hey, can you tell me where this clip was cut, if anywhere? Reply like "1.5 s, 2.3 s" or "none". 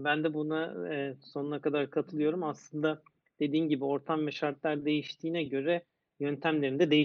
none